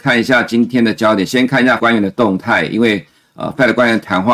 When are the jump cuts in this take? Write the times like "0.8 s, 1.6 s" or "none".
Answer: 1.8 s